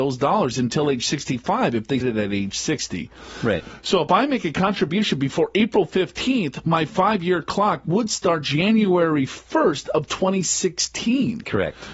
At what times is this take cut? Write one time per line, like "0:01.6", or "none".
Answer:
0:02.0